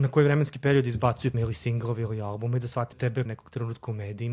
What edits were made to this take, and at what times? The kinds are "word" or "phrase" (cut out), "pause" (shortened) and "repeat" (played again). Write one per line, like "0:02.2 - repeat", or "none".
0:01.3 - word
0:02.9 - word
0:03.3 - phrase